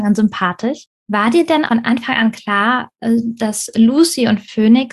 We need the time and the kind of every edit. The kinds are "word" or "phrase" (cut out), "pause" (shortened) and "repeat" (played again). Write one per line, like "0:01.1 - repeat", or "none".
0:01.0 - pause
0:01.7 - word